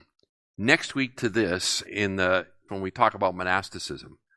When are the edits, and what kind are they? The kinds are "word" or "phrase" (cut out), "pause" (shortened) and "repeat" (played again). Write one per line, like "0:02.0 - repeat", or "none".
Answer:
0:01.2 - word
0:01.8 - word
0:02.7 - word